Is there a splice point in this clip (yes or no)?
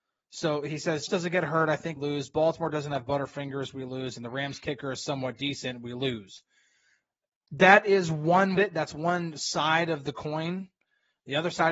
yes